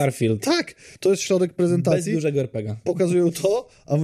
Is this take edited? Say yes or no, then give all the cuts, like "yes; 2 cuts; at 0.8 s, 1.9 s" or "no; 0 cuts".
no; 0 cuts